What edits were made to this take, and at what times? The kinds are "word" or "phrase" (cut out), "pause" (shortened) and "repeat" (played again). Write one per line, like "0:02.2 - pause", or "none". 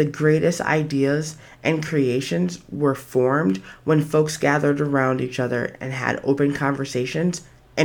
none